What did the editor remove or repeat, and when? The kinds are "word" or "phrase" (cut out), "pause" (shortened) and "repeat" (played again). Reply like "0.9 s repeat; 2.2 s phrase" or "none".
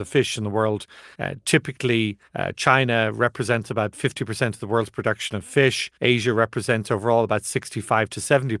1.1 s pause; 2.3 s pause; 5.9 s pause